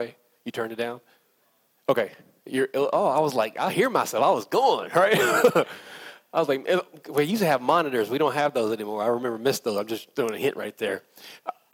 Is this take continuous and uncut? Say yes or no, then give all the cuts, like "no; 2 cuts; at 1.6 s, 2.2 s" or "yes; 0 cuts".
yes; 0 cuts